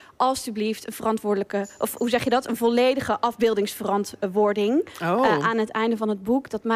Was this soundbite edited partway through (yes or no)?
no